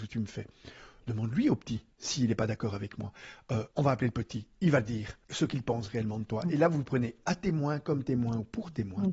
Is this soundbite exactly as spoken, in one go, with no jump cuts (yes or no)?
no